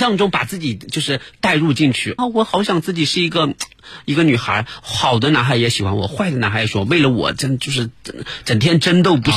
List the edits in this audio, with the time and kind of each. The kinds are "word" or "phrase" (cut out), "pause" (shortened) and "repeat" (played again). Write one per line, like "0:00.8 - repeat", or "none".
0:02.2 - word